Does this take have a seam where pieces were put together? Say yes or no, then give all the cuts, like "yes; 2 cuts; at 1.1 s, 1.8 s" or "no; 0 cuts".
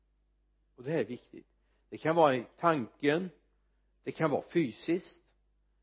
no; 0 cuts